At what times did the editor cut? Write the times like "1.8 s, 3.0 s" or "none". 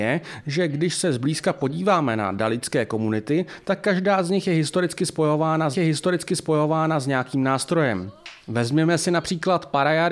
5.7 s, 8.4 s